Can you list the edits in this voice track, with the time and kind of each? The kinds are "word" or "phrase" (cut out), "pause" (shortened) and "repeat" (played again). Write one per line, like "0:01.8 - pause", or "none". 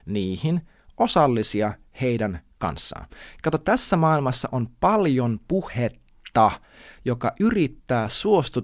none

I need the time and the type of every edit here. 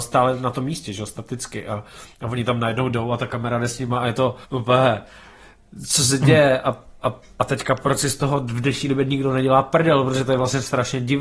0:04.4 - pause

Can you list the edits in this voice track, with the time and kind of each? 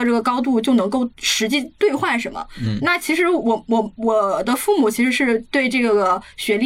0:01.1 - pause

